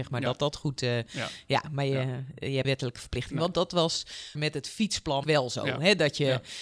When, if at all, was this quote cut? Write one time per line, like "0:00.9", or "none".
0:02.6
0:04.4
0:05.2